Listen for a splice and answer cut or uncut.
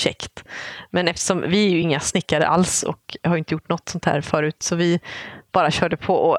uncut